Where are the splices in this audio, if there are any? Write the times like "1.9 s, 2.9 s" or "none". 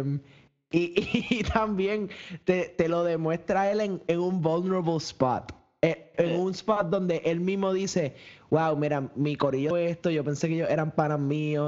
9.7 s